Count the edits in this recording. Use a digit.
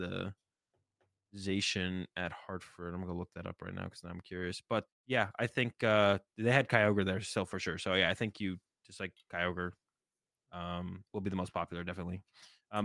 1